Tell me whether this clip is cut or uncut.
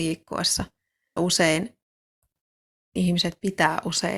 cut